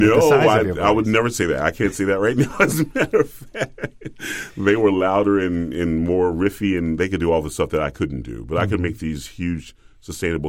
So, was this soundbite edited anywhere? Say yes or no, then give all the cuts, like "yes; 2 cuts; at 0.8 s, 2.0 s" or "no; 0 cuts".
no; 0 cuts